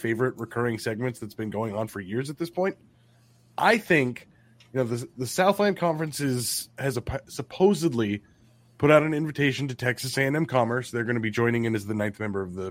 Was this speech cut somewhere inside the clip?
no; 0 cuts

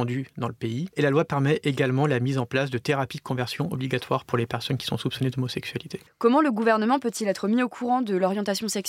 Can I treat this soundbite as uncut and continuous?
yes; 0 cuts

